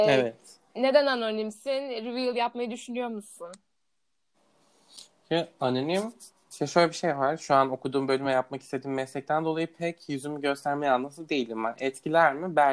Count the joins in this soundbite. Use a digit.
0